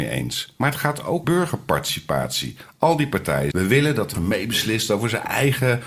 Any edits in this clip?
yes; 3 cuts; at 1.2 s, 3.5 s, 4.1 s

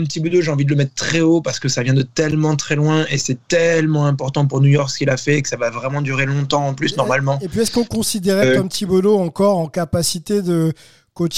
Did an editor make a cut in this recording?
no; 0 cuts

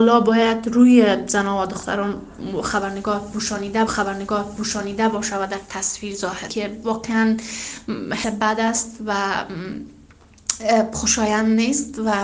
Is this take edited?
yes; 3 cuts; at 3.9 s, 6.5 s, 8.2 s

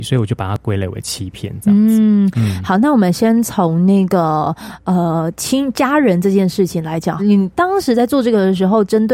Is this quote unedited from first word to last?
no; 1 cut; at 7.2 s

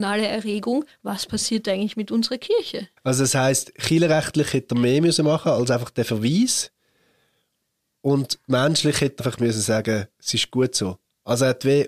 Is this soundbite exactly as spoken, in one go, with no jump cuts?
no; 3 cuts; at 0.9 s, 3.0 s, 9.2 s

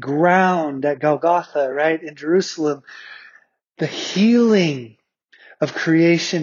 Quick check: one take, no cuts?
yes; 0 cuts

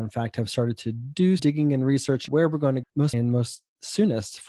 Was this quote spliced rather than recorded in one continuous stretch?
yes; 4 cuts; at 1.4 s, 2.3 s, 2.8 s, 3.1 s

